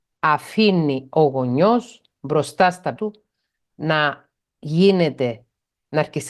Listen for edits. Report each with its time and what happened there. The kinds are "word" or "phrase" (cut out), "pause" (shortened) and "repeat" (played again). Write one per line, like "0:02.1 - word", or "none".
0:03.0 - word